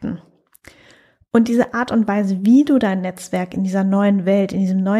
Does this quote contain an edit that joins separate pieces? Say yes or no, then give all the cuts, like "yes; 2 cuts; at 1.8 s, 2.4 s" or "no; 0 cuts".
no; 0 cuts